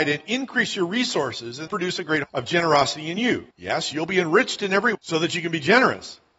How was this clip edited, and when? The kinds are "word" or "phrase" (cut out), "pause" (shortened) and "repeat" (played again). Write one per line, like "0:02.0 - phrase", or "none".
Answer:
0:01.7 - word
0:02.2 - word
0:03.5 - pause
0:04.9 - word

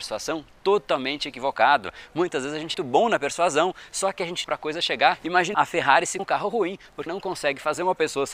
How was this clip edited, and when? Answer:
0:02.7 - phrase
0:04.4 - phrase
0:05.5 - word
0:06.2 - word
0:07.1 - word

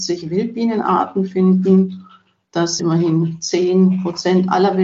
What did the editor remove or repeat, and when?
0:02.8 - word

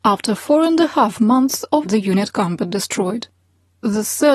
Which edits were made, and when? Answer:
0:01.8 - phrase

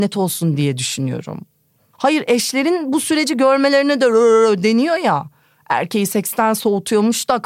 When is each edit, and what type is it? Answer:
none

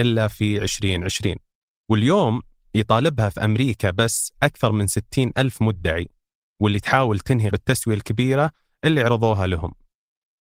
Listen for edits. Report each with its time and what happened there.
0:07.5 - word

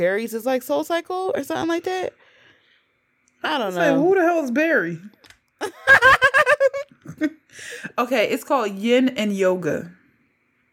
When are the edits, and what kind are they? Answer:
none

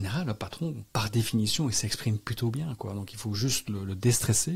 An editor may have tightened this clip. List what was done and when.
none

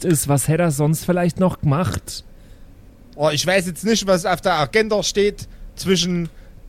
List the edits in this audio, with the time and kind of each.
none

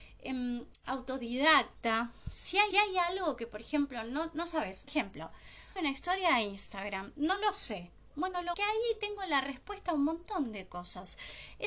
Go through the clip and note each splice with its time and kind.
0:02.7 - repeat
0:04.9 - word
0:05.8 - phrase
0:08.5 - phrase

